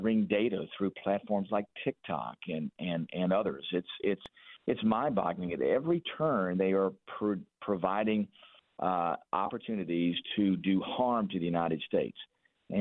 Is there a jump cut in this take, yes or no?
no